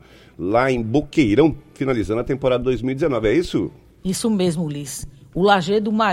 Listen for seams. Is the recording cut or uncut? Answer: uncut